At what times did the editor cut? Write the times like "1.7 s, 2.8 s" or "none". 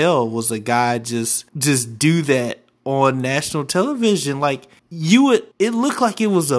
1.5 s, 4.8 s, 5.5 s